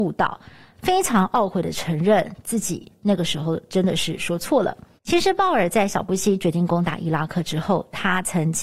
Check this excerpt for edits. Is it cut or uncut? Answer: cut